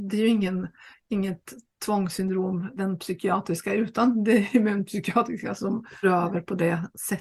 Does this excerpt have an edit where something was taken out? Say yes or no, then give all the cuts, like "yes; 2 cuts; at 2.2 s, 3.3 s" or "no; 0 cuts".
yes; 2 cuts; at 2.8 s, 6.0 s